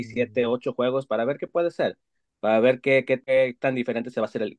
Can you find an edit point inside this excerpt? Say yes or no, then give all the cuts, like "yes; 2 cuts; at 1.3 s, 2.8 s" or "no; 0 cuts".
no; 0 cuts